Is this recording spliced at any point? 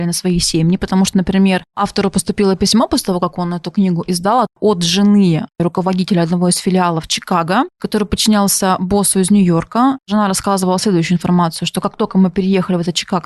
yes; 1 cut; at 1.1 s

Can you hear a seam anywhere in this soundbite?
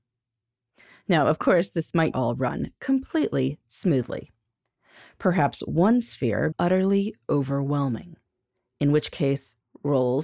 yes; 2 cuts; at 2.1 s, 6.5 s

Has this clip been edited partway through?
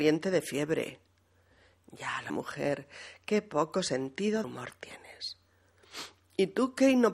yes; 2 cuts; at 2.3 s, 4.4 s

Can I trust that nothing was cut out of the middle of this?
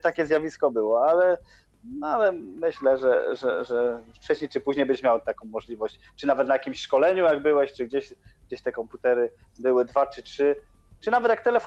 yes; 0 cuts

